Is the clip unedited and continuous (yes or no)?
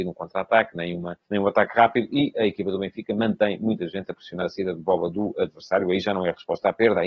no